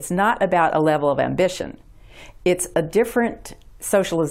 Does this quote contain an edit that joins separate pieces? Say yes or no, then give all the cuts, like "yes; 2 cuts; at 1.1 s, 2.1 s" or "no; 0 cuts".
no; 0 cuts